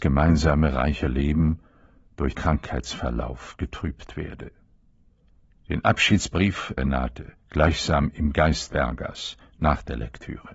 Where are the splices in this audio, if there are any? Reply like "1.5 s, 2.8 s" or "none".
2.3 s, 6.8 s, 7.4 s, 8.7 s

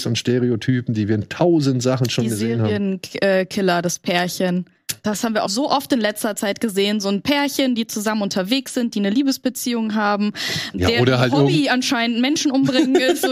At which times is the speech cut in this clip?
5.5 s, 10.7 s

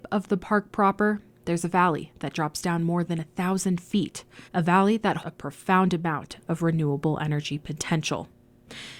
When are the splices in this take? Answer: 4.5 s, 5.2 s

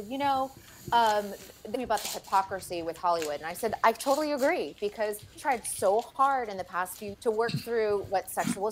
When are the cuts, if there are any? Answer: 1.7 s, 5.3 s, 7.1 s

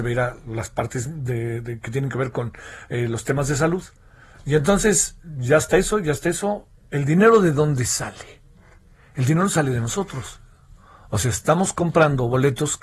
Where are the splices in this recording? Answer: none

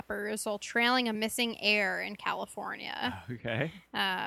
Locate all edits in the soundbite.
none

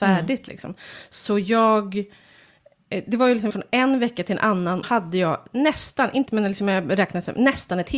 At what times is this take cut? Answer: 3.5 s, 4.8 s, 6.3 s

